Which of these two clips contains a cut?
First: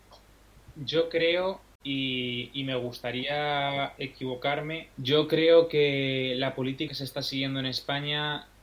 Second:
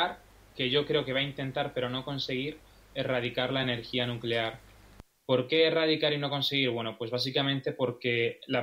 first; 3 cuts; at 1.6 s, 4.9 s, 6.9 s

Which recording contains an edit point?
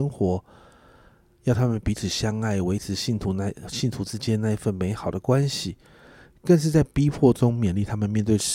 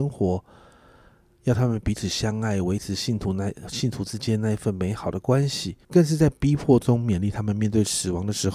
second; 1 cut; at 5.8 s

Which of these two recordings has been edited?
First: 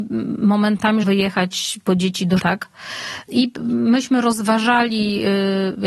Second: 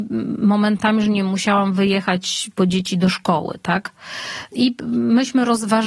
first; 2 cuts; at 1.0 s, 2.4 s

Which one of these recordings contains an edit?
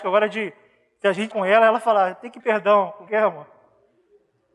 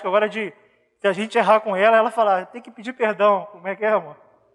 first; 3 cuts; at 1.3 s, 2.4 s, 3.1 s

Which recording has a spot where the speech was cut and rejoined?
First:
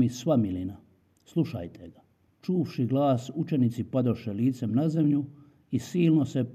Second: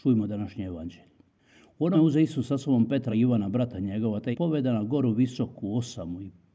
second; 3 cuts; at 1.9 s, 3.1 s, 4.3 s

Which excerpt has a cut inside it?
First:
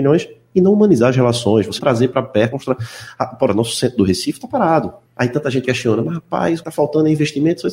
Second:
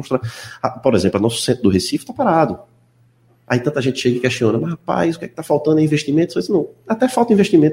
first; 6 cuts; at 1.8 s, 2.5 s, 3.5 s, 5.1 s, 5.6 s, 6.6 s

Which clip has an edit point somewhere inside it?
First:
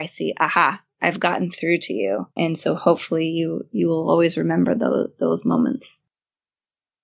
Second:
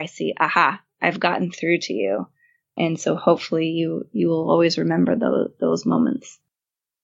first; 1 cut; at 2.3 s

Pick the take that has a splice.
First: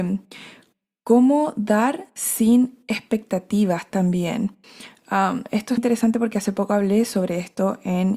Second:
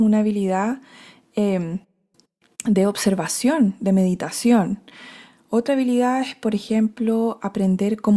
first; 1 cut; at 5.8 s

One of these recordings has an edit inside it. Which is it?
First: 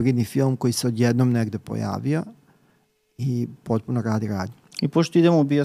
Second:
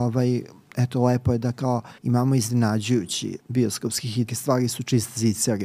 second; 3 cuts; at 2.0 s, 3.4 s, 4.3 s

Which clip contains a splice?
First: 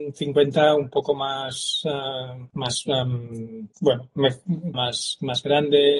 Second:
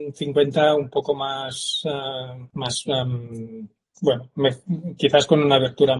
first; 2 cuts; at 3.7 s, 4.7 s

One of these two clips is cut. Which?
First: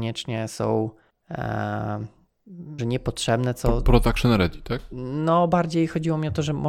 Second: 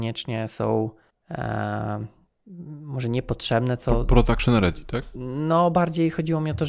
first; 1 cut; at 2.8 s

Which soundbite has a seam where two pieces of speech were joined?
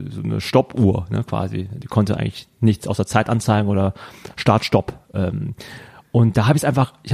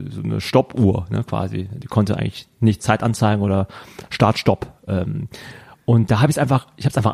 second; 1 cut; at 2.8 s

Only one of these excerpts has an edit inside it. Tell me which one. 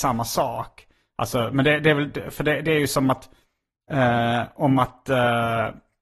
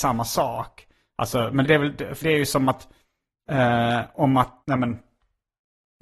second; 3 cuts; at 1.6 s, 2.2 s, 4.6 s

